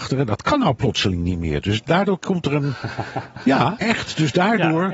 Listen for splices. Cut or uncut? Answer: cut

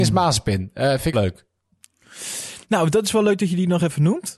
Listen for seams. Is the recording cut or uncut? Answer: cut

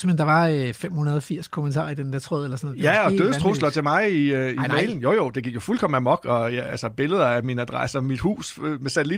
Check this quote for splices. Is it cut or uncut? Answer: uncut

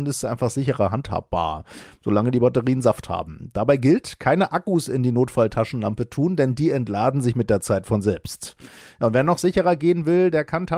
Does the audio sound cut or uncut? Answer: uncut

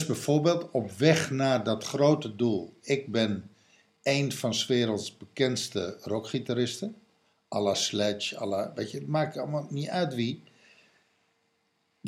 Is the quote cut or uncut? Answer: uncut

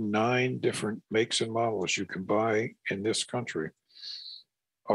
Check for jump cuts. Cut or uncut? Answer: uncut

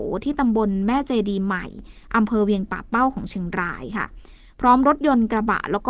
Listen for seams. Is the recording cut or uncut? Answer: uncut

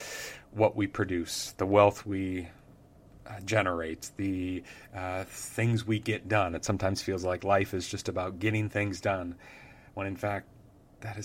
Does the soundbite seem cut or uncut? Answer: uncut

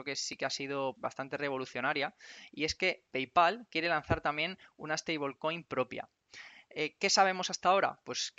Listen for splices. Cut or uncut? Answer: cut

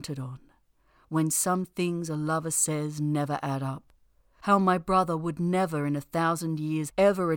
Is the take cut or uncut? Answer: uncut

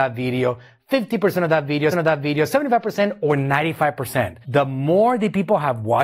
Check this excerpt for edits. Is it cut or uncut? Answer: cut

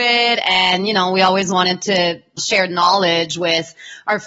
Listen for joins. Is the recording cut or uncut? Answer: uncut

